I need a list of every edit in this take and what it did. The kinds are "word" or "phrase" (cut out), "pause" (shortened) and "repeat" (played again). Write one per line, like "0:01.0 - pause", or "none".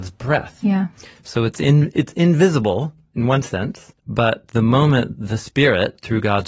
0:04.0 - pause